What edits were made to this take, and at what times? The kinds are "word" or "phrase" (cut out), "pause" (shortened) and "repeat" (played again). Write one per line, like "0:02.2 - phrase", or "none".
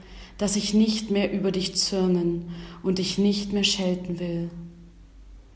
none